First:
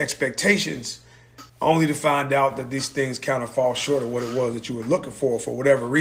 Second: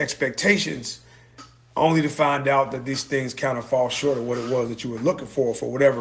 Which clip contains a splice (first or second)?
first